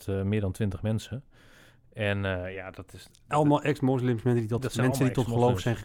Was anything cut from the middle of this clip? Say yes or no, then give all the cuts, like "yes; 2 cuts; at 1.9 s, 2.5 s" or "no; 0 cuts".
no; 0 cuts